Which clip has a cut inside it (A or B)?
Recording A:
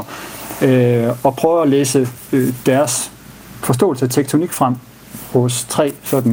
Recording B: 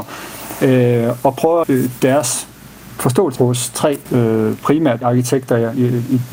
B